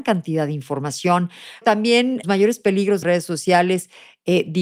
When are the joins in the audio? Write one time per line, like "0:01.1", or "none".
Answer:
0:01.6
0:02.2
0:03.0